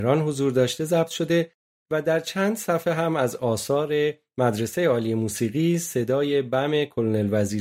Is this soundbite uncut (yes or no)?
yes